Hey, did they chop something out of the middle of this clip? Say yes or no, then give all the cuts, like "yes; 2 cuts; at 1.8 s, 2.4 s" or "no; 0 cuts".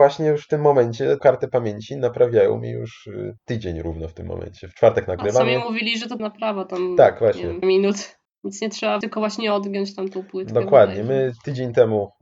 yes; 6 cuts; at 1.2 s, 3.4 s, 6.2 s, 7.6 s, 8.3 s, 9.0 s